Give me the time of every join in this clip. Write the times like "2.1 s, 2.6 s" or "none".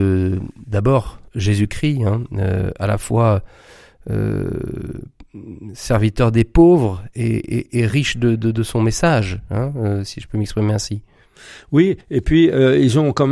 1.3 s, 12.0 s